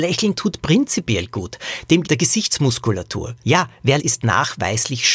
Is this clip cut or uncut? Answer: cut